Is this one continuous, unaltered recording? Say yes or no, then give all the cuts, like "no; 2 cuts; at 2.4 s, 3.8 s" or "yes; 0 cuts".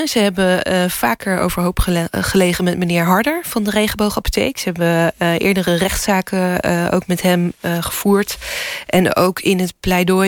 yes; 0 cuts